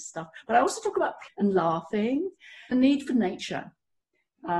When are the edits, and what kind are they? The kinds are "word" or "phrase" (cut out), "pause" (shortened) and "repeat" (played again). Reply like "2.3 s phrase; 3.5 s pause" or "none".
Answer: 1.3 s word; 2.7 s word